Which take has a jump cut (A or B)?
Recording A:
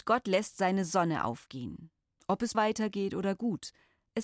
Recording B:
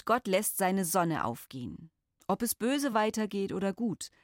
A